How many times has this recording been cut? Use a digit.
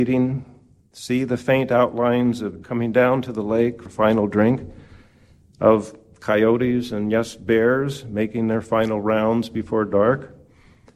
2